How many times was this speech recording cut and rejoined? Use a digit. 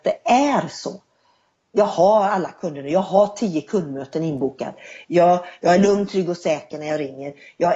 0